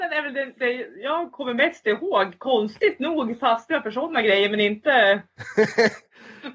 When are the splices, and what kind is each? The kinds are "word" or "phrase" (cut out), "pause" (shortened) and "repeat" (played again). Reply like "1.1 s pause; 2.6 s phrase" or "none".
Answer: none